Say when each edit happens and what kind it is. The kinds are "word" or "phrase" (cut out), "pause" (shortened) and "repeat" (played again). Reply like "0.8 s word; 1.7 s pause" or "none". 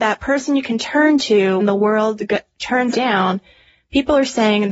1.6 s word; 2.9 s word